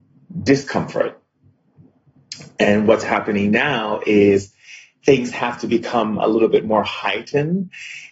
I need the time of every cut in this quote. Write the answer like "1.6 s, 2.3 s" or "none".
none